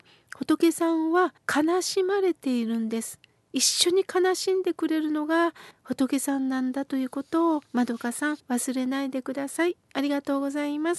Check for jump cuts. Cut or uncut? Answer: cut